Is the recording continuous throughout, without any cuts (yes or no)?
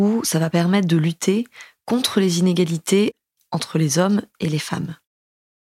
yes